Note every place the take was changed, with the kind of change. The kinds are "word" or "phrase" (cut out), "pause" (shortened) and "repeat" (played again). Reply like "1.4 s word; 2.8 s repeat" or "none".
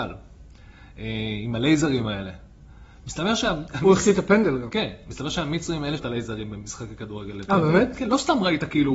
6.0 s word